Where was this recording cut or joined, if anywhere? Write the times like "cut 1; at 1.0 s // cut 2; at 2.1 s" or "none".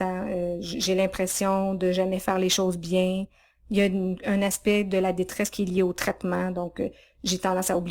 none